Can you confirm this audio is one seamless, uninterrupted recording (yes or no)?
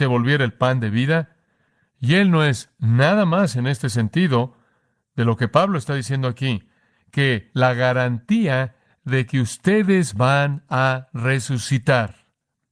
yes